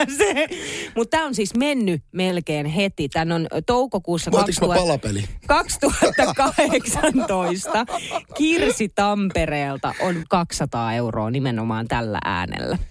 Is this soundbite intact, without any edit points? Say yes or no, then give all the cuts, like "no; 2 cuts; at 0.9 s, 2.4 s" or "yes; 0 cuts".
no; 1 cut; at 10.2 s